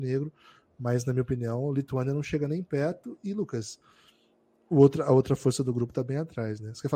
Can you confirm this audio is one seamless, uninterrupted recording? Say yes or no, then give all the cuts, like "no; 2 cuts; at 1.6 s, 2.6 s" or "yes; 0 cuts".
yes; 0 cuts